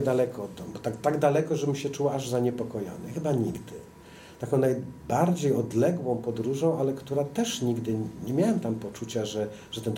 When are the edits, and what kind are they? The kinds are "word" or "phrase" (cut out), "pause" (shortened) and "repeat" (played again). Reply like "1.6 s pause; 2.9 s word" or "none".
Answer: none